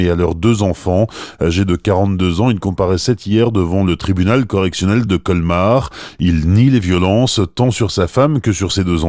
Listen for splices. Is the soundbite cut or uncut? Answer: uncut